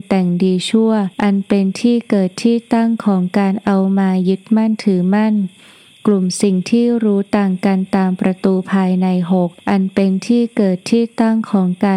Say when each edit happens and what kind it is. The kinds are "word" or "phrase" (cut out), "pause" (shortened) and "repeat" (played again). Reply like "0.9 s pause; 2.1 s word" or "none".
1.1 s pause; 9.6 s pause

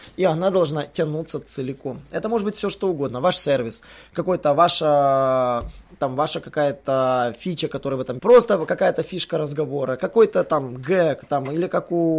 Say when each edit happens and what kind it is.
8.2 s phrase

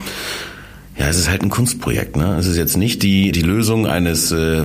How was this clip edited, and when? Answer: 3.3 s word

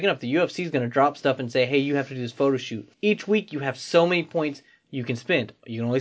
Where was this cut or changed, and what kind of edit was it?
2.9 s pause

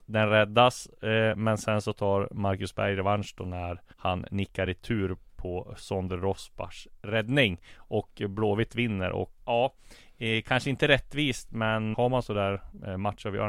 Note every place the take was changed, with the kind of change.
3.9 s pause; 4.7 s phrase; 9.4 s word; 11.9 s word

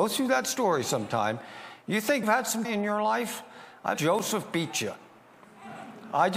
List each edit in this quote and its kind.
2.2 s word; 2.6 s word; 3.9 s word

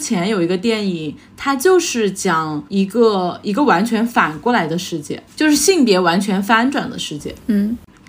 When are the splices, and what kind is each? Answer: 2.7 s pause; 5.3 s pause

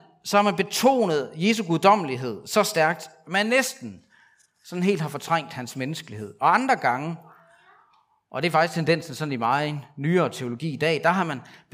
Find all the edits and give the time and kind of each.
none

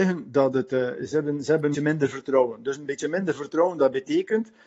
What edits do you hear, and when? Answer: 1.7 s phrase

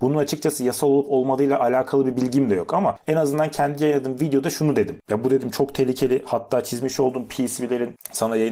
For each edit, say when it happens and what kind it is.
none

